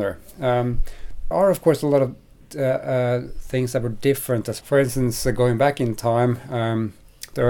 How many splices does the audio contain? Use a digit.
2